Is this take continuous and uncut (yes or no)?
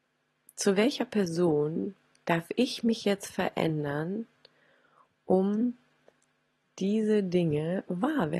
yes